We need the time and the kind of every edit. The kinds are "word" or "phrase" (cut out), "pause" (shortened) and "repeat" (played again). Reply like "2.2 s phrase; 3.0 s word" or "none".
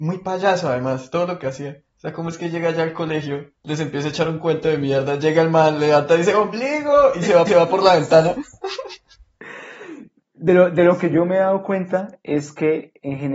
1.9 s pause; 3.6 s pause; 7.5 s repeat